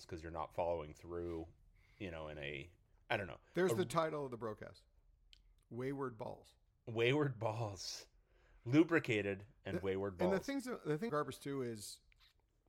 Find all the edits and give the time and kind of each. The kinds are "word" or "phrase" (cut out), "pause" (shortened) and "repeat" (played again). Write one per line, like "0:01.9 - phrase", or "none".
0:02.9 - pause
0:11.1 - word